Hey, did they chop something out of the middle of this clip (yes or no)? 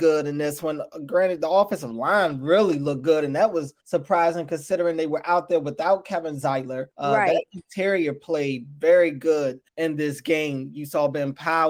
yes